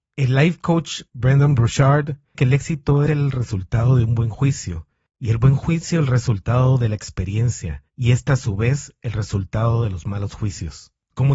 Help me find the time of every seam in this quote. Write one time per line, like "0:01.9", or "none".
0:01.1
0:02.3
0:03.1
0:05.1
0:07.9